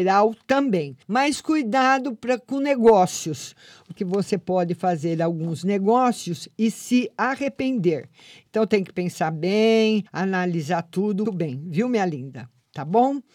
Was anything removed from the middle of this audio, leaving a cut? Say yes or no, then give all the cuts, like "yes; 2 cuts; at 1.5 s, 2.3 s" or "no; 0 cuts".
yes; 4 cuts; at 1.0 s, 4.0 s, 10.1 s, 11.3 s